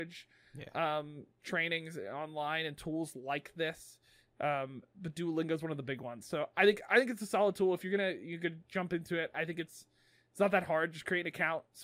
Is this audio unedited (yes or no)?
yes